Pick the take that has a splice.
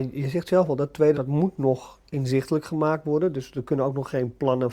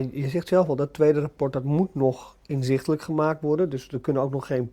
first; 1 cut; at 1.1 s

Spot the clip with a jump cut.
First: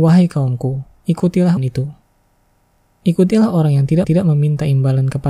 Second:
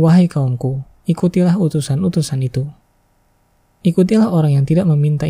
first; 2 cuts; at 1.6 s, 4.0 s

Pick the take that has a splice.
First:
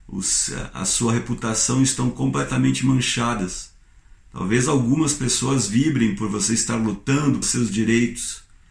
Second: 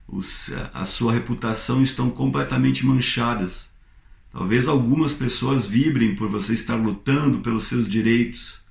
first; 1 cut; at 7.4 s

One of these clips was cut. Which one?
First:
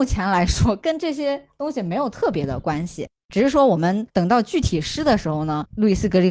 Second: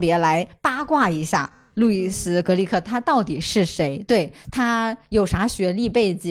first; 1 cut; at 4.1 s

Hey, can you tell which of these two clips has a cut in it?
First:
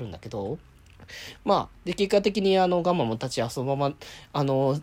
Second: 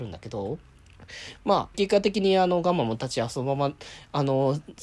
second; 1 cut; at 1.7 s

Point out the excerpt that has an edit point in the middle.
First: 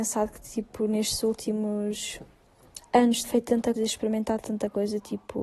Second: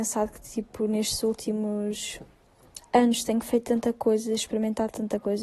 first; 2 cuts; at 3.2 s, 3.8 s

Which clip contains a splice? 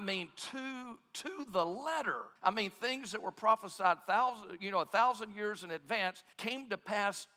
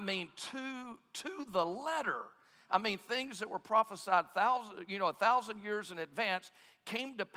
first; 2 cuts; at 2.4 s, 6.3 s

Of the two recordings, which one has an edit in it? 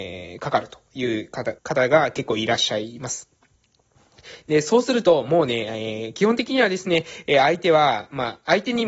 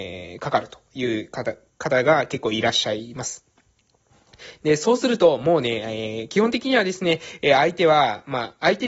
first; 1 cut; at 1.6 s

